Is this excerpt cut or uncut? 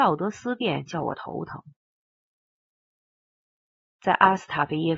uncut